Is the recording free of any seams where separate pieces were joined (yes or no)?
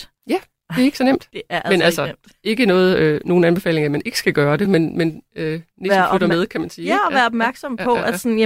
yes